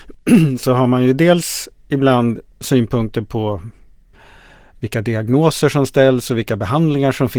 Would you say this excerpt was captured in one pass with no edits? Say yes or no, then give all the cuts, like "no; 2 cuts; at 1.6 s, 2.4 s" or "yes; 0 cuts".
yes; 0 cuts